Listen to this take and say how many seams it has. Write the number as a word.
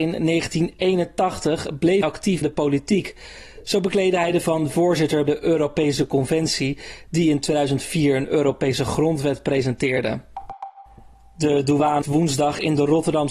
five